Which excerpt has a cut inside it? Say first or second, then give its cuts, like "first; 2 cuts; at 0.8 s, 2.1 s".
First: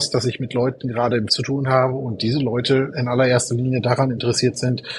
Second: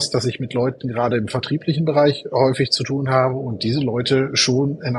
first; 2 cuts; at 1.3 s, 2.9 s